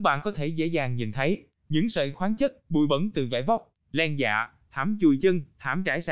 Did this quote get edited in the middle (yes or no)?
no